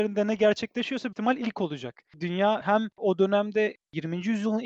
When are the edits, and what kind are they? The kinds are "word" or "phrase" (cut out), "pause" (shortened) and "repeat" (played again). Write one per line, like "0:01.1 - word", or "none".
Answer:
0:01.1 - word
0:02.9 - pause